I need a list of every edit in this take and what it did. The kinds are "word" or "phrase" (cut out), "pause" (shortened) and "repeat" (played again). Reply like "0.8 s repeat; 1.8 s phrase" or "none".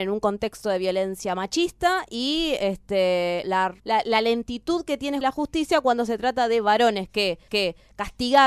3.4 s word; 3.8 s pause; 5.2 s word; 7.5 s repeat